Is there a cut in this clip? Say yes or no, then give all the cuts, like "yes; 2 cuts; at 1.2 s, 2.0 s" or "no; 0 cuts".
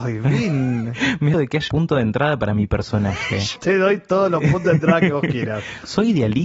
yes; 3 cuts; at 1.3 s, 1.7 s, 3.6 s